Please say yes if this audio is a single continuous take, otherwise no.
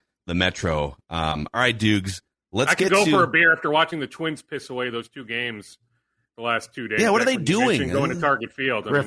yes